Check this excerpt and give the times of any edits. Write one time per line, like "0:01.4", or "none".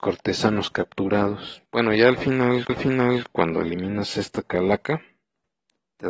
0:01.7
0:02.7